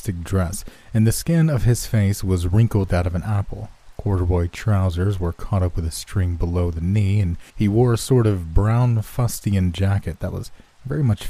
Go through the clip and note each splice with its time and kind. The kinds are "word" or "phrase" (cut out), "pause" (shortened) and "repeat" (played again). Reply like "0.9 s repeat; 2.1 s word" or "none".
2.9 s word; 7.5 s pause